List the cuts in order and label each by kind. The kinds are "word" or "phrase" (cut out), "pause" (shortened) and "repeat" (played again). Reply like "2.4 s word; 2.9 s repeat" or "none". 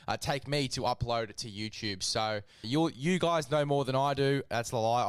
2.6 s word